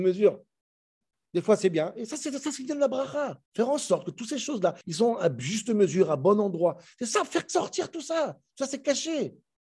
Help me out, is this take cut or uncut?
cut